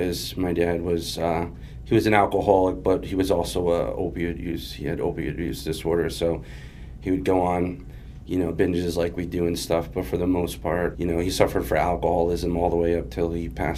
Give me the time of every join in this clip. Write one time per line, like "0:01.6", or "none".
0:10.9